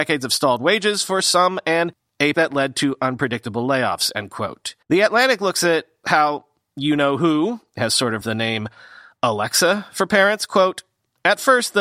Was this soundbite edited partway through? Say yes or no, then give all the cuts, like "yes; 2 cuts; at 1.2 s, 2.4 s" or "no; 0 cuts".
yes; 3 cuts; at 2.3 s, 4.8 s, 8.2 s